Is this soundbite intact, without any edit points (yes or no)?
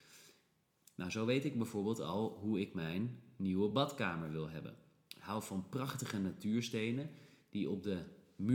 yes